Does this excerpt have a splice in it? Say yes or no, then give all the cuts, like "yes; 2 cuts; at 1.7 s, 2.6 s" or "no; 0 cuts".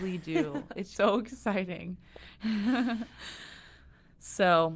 yes; 1 cut; at 0.9 s